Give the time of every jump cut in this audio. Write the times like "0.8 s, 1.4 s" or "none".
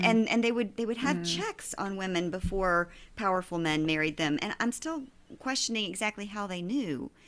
none

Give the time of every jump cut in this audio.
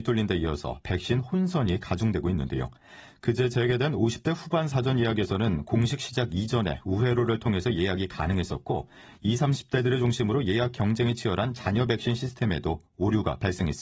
none

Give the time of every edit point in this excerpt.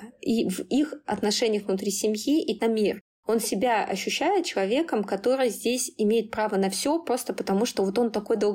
2.6 s

